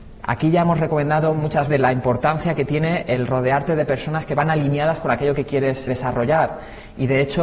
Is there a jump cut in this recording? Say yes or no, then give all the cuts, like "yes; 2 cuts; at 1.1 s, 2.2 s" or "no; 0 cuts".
yes; 2 cuts; at 1.7 s, 5.9 s